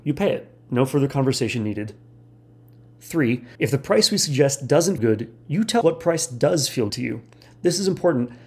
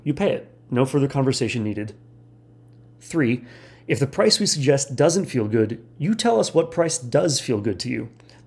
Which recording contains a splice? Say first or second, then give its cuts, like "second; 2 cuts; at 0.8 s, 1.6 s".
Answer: first; 4 cuts; at 3.5 s, 5.0 s, 5.8 s, 6.9 s